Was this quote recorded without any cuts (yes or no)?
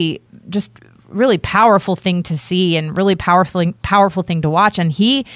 no